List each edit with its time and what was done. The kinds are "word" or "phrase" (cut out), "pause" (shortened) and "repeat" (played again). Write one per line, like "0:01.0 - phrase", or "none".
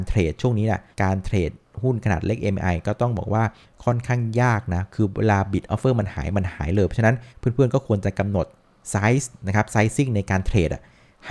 0:00.9 - pause
0:03.6 - pause
0:07.3 - pause

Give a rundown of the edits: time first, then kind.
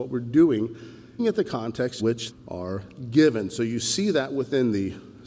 0:01.2 - phrase
0:02.0 - word
0:02.3 - word

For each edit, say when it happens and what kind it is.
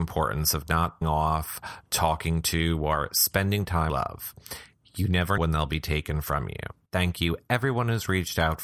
0:01.0 - word
0:03.9 - phrase
0:05.4 - word
0:06.8 - pause

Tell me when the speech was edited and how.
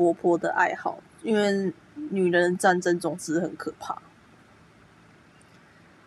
0:01.1 - pause

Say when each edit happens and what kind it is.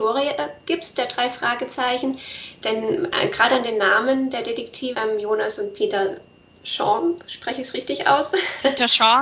0:04.9 - word

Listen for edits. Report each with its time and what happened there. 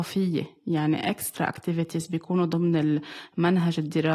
none

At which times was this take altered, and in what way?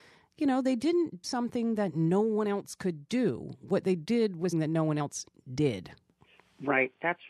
0:01.2 - word
0:04.5 - word

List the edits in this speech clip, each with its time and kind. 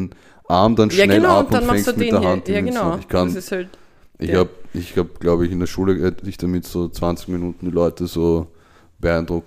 none

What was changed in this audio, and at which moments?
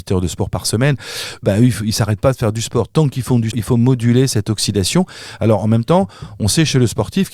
0:01.4 - word
0:03.5 - word

